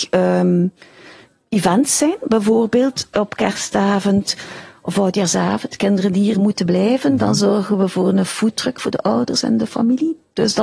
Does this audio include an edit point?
no; 0 cuts

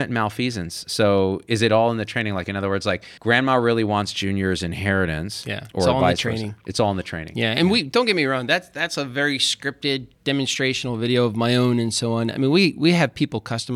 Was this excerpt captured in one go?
no; 2 cuts; at 3.2 s, 10.1 s

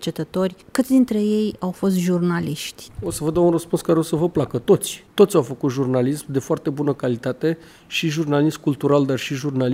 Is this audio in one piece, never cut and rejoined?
yes; 0 cuts

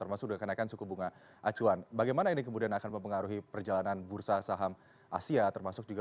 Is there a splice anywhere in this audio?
no; 0 cuts

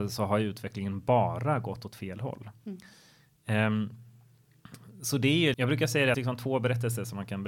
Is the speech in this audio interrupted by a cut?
yes; 2 cuts; at 5.5 s, 6.1 s

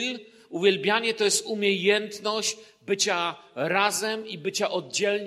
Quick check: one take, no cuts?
yes; 0 cuts

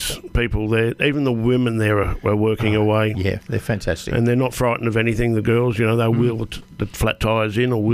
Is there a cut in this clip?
no; 0 cuts

